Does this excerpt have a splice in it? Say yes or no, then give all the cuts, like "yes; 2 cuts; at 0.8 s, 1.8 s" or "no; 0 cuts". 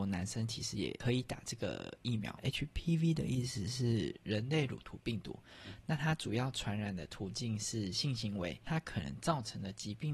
no; 0 cuts